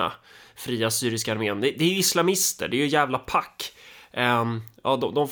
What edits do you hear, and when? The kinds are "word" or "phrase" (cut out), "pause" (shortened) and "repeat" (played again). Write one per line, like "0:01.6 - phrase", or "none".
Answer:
none